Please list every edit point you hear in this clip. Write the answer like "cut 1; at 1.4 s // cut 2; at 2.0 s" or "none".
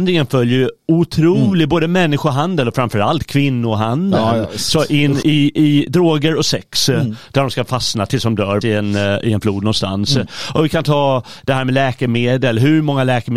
cut 1; at 5.2 s // cut 2; at 8.6 s